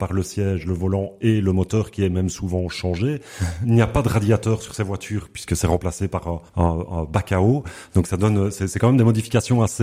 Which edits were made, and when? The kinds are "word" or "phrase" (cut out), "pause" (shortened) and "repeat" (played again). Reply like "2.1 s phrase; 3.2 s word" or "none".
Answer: 6.5 s pause